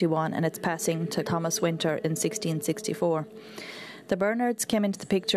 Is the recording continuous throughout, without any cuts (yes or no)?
no